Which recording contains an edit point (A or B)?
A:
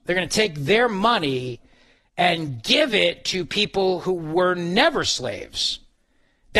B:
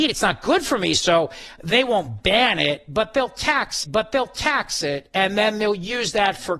B